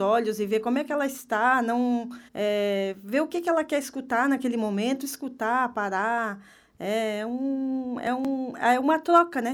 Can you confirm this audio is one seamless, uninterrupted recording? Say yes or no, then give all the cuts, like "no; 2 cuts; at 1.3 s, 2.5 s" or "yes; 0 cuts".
no; 1 cut; at 2.3 s